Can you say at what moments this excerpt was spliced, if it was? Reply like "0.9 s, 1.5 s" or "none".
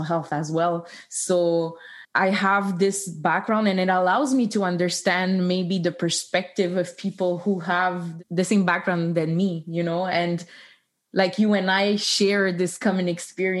none